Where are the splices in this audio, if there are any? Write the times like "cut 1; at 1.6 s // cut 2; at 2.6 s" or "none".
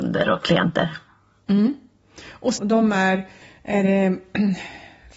cut 1; at 2.6 s // cut 2; at 3.4 s